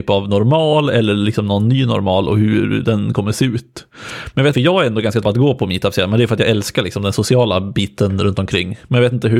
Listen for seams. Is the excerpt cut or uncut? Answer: cut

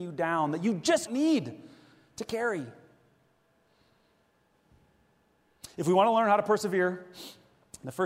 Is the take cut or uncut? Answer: cut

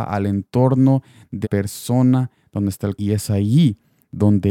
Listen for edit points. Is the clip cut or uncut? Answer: cut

